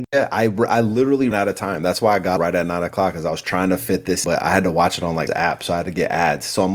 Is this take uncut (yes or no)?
no